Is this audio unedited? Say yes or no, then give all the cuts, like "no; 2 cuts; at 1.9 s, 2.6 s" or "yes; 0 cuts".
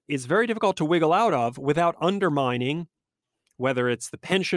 yes; 0 cuts